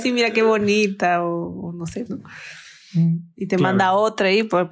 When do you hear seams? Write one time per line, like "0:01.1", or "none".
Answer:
0:02.1

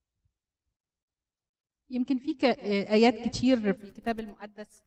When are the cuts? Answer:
none

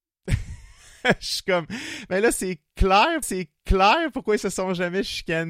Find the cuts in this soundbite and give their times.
0:03.2

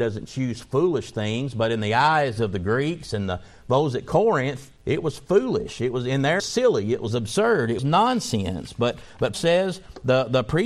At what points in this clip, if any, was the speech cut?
0:04.8
0:06.4
0:07.8
0:09.3

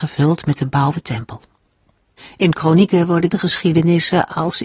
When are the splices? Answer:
0:00.9
0:02.2
0:03.3

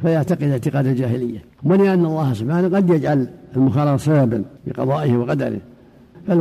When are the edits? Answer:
0:01.5
0:04.6

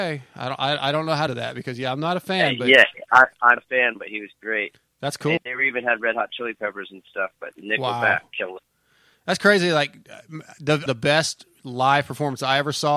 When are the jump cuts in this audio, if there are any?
0:01.3
0:03.6
0:05.4
0:10.9

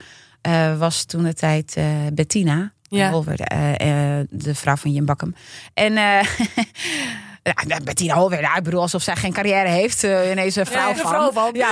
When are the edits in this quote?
0:02.8

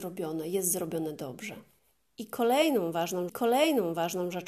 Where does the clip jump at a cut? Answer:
0:01.8
0:03.3

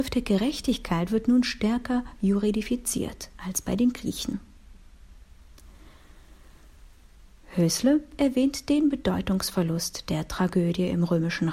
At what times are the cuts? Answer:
none

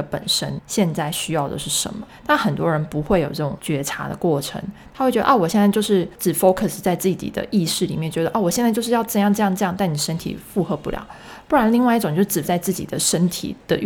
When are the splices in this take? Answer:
0:12.4

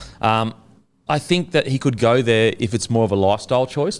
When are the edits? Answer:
0:01.1

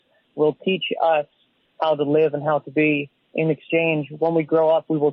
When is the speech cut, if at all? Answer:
none

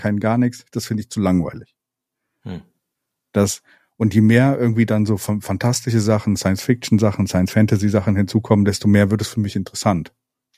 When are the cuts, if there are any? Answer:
none

